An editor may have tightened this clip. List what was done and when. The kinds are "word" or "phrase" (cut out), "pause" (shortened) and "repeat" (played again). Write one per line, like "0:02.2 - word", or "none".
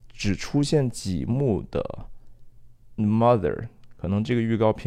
0:03.0 - word